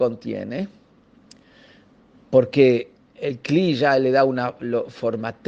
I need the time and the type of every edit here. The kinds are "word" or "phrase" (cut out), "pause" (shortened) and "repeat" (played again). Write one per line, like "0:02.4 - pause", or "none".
0:03.1 - pause